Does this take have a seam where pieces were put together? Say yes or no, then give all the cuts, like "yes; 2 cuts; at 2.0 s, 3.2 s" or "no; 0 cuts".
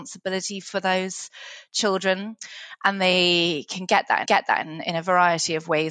yes; 1 cut; at 4.3 s